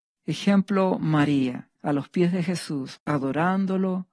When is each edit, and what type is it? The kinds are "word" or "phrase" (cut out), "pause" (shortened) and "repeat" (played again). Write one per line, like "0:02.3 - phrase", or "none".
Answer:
0:01.8 - pause